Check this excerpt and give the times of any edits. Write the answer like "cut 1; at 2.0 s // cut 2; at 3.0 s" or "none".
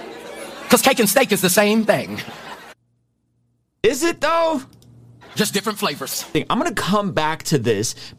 none